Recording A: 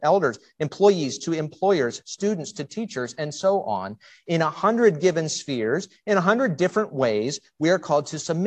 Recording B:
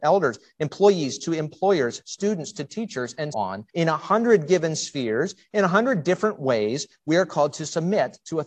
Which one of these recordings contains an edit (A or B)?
B